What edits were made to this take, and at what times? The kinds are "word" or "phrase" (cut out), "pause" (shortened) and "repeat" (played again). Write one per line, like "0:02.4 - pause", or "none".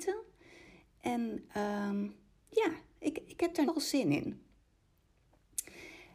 0:03.7 - word